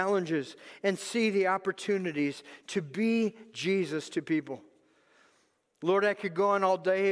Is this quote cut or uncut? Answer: uncut